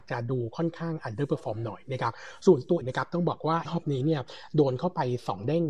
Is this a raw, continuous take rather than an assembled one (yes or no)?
no